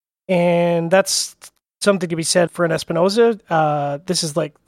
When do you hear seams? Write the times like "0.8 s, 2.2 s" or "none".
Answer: 2.5 s